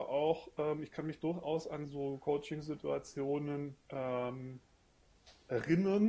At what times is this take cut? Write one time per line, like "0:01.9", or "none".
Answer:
0:03.8